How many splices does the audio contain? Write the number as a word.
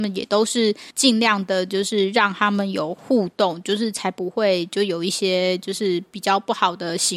one